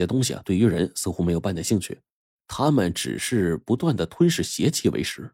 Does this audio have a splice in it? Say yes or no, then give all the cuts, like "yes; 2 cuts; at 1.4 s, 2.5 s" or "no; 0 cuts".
no; 0 cuts